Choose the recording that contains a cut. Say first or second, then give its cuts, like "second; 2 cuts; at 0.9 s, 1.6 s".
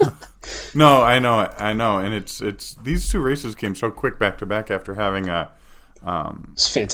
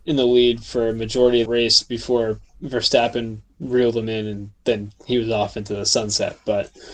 second; 2 cuts; at 1.5 s, 3.6 s